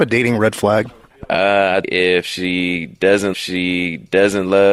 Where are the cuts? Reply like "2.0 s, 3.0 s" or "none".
1.8 s, 3.3 s